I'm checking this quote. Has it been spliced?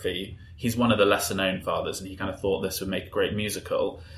yes; 1 cut; at 1.6 s

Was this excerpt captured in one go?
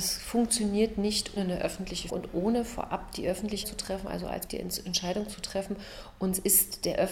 no; 4 cuts; at 1.4 s, 2.1 s, 3.6 s, 4.5 s

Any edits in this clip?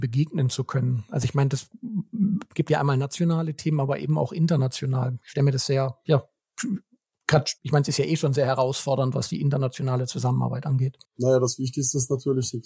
yes; 1 cut; at 7.6 s

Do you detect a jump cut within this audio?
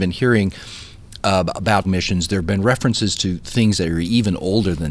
yes; 1 cut; at 1.8 s

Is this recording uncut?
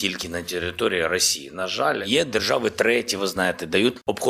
yes; 0 cuts

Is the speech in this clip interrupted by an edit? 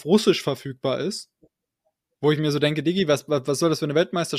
no; 0 cuts

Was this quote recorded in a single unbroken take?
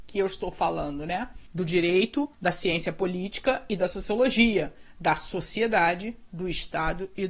no; 2 cuts; at 1.5 s, 2.3 s

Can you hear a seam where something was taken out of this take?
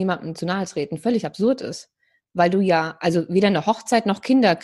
no; 0 cuts

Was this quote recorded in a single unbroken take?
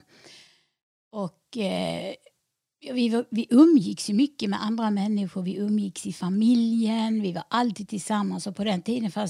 yes; 0 cuts

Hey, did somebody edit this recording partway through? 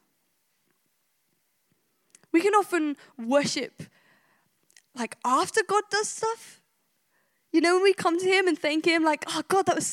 no; 0 cuts

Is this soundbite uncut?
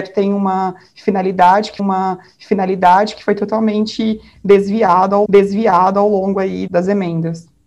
no; 3 cuts; at 1.8 s, 5.3 s, 6.7 s

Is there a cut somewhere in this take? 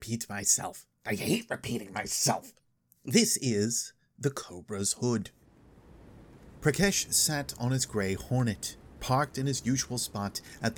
yes; 2 cuts; at 0.9 s, 2.6 s

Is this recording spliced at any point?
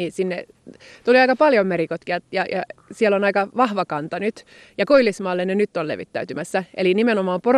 no; 0 cuts

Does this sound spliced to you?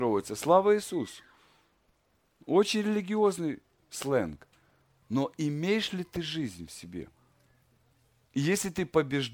no; 0 cuts

